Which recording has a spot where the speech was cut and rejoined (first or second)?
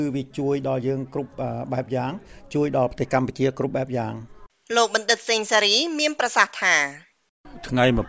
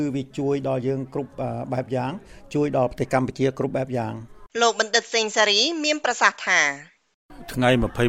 second